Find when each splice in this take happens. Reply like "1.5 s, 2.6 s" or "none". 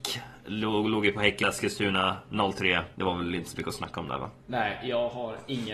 1.4 s, 2.9 s, 4.4 s